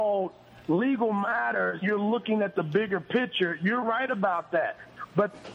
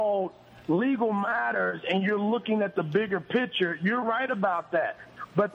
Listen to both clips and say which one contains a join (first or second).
first